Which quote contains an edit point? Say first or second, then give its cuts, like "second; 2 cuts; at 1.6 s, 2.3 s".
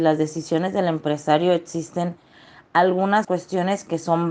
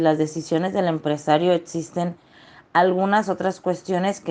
first; 1 cut; at 3.2 s